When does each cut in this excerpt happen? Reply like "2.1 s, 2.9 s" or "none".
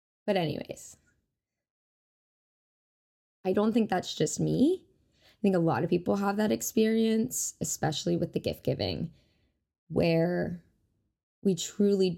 none